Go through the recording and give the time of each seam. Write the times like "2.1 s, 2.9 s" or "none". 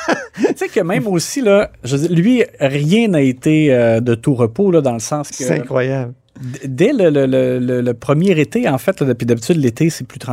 2.5 s